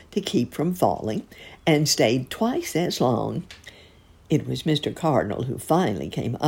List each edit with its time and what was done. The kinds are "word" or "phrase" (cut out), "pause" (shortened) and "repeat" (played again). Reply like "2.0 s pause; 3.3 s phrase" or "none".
none